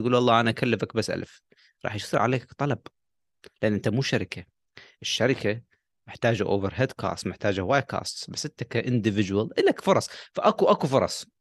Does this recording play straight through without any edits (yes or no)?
yes